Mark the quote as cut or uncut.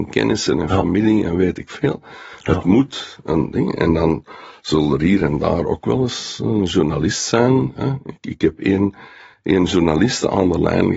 uncut